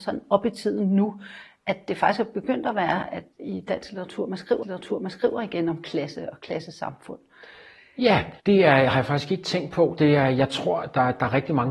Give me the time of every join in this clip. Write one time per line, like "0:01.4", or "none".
0:03.3
0:04.6
0:08.4